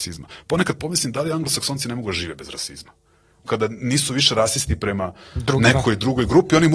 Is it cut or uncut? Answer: cut